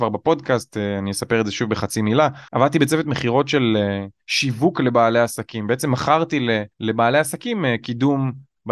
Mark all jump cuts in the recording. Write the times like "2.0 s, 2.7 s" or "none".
2.5 s, 6.7 s